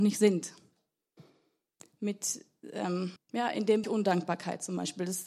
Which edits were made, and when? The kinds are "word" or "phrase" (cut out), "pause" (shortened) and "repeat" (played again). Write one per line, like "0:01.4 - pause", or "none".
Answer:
0:03.2 - pause
0:03.8 - word